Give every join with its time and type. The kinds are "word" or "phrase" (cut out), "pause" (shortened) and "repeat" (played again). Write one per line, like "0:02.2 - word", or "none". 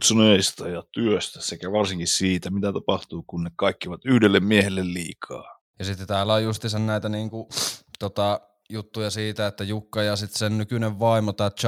0:05.7 - pause